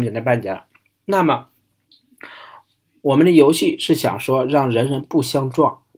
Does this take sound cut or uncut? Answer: uncut